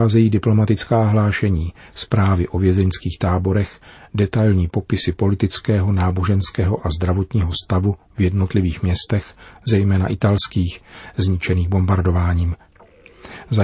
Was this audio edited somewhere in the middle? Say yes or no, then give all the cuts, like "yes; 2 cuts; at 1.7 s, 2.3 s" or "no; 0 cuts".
no; 0 cuts